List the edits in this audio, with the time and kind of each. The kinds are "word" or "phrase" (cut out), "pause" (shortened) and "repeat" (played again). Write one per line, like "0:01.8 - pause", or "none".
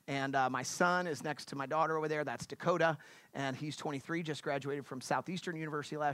none